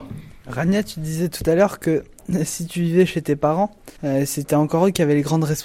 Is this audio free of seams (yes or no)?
no